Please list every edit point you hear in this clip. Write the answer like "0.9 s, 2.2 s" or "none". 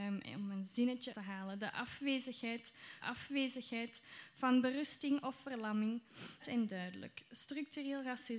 1.1 s, 3.0 s, 6.4 s